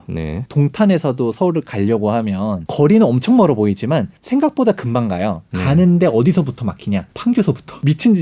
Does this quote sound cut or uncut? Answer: cut